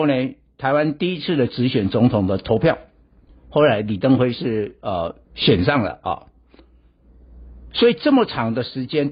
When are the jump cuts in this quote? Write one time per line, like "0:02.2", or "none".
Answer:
0:03.3
0:05.2